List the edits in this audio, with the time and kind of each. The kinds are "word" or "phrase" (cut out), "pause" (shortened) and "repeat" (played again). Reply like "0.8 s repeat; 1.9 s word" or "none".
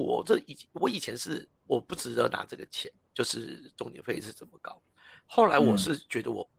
none